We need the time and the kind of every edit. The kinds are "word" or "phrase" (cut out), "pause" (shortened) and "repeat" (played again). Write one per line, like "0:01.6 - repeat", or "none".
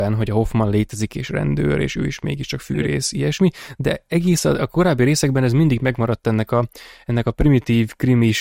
none